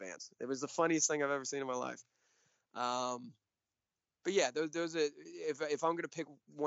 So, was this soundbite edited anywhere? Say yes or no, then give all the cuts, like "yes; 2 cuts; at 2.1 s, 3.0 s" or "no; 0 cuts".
no; 0 cuts